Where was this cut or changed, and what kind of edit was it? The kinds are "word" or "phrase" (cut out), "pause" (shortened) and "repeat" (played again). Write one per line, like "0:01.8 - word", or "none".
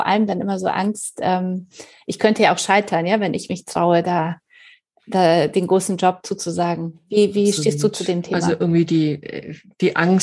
none

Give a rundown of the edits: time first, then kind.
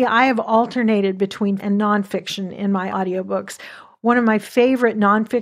0:01.6 - word
0:02.9 - word

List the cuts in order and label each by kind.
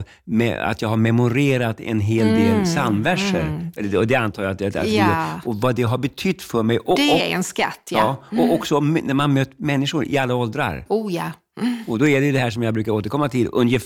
none

